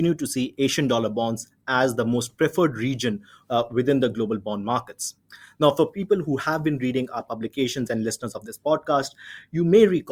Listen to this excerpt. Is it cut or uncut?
uncut